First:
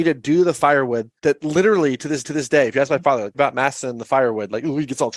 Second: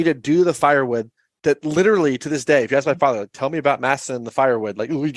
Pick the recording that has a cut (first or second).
first